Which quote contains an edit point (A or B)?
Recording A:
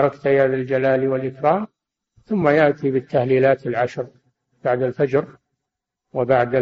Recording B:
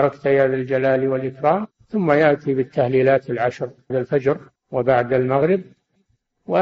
B